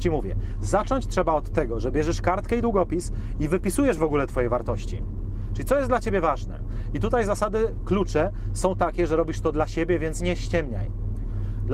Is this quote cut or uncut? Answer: uncut